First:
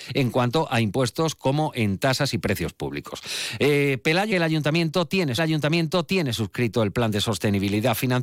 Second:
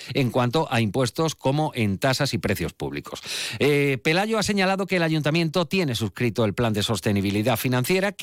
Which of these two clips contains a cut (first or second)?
first